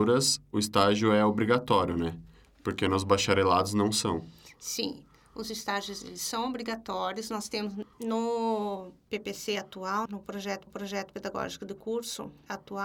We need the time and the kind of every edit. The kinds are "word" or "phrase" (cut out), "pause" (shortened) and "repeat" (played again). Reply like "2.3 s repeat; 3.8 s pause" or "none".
10.1 s word; 10.7 s repeat